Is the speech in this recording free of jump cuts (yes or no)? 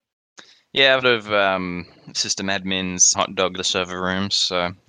no